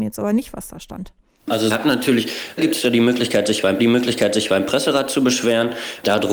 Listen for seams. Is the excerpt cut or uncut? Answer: cut